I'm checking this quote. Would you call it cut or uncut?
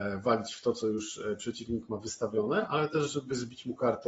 uncut